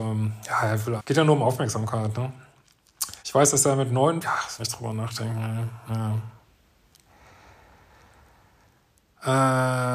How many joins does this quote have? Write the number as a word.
four